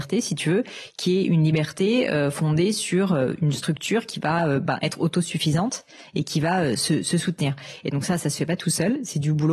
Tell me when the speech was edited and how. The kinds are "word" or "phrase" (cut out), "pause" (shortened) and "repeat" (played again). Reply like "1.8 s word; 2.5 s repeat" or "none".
none